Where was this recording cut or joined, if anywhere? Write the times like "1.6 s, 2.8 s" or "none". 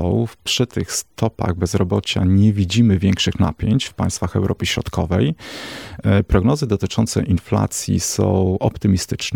1.1 s